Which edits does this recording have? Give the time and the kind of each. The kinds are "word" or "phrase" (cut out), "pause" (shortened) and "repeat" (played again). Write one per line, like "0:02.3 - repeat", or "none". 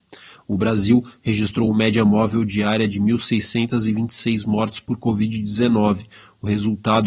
none